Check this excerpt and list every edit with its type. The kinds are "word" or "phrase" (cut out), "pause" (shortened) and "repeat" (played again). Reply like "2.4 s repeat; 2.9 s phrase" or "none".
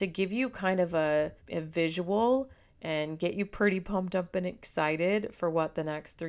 1.4 s pause